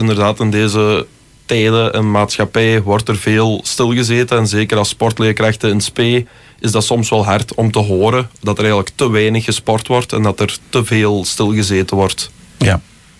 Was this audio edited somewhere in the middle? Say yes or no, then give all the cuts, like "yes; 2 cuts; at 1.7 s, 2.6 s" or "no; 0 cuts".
no; 0 cuts